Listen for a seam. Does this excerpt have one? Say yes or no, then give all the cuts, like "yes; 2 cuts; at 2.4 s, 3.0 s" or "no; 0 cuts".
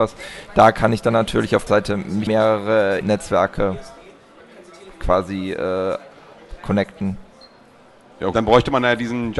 yes; 4 cuts; at 1.7 s, 2.3 s, 3.0 s, 8.3 s